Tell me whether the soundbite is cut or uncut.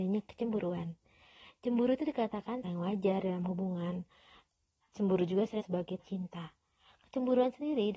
cut